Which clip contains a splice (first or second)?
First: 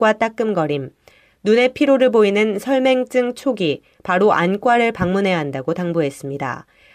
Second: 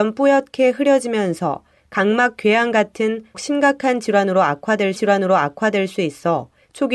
second